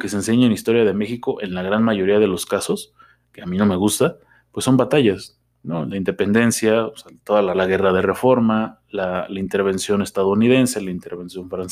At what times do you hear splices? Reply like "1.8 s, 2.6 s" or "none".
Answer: 7.5 s